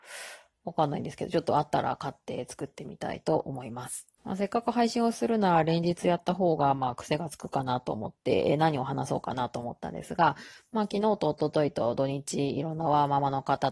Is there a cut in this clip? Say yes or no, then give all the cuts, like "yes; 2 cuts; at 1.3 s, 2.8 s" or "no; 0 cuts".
yes; 1 cut; at 4.2 s